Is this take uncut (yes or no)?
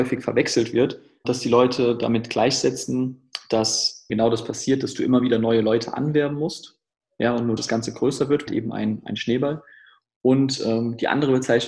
no